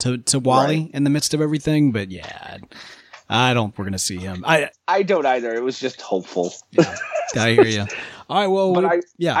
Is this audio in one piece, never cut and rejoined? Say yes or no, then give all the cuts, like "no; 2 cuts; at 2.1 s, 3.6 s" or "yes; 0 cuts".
no; 2 cuts; at 3.7 s, 4.7 s